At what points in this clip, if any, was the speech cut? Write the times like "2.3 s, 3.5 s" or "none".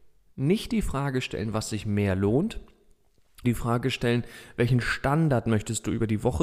3.4 s

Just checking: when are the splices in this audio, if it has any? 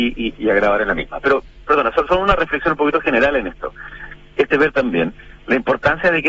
4.5 s

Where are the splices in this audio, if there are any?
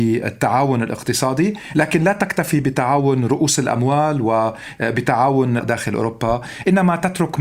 5.6 s

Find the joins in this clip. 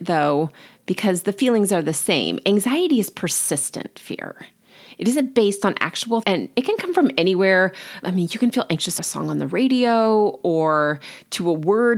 6.2 s, 8.0 s, 9.0 s

